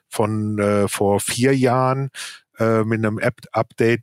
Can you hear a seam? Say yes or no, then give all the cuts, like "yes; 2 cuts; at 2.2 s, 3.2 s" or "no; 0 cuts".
no; 0 cuts